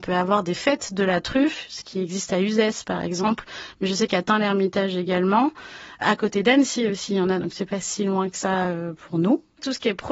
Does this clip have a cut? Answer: no; 0 cuts

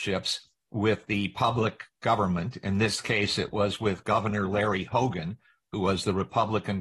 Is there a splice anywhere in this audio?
no; 0 cuts

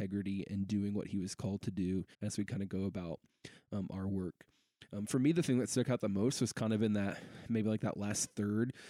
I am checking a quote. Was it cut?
yes; 1 cut; at 2.1 s

